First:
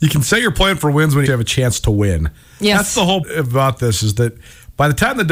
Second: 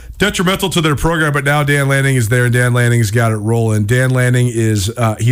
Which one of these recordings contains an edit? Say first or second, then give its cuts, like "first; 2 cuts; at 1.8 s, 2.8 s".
first; 2 cuts; at 1.3 s, 3.2 s